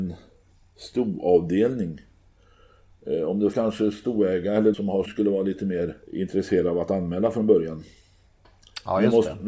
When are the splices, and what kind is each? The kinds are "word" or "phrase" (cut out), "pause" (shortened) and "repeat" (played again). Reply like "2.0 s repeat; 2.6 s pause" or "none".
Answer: 3.5 s phrase; 4.7 s word; 5.1 s word; 6.0 s pause